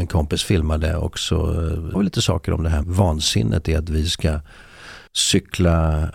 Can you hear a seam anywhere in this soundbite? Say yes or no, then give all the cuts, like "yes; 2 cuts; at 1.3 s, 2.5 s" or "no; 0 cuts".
yes; 3 cuts; at 1.9 s, 2.8 s, 5.1 s